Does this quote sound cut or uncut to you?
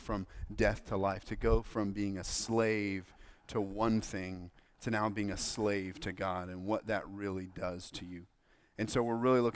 uncut